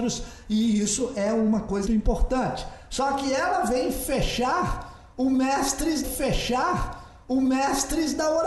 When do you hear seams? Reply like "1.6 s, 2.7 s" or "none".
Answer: 1.9 s, 6.0 s